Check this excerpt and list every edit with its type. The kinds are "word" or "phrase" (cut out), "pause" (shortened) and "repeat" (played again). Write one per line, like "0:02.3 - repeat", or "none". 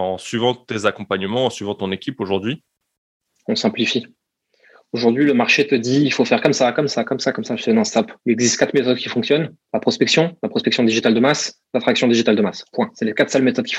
0:06.9 - phrase
0:08.2 - pause
0:09.6 - pause
0:11.7 - word